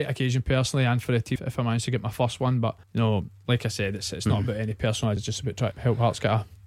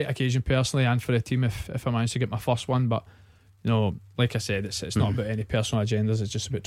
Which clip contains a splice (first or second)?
first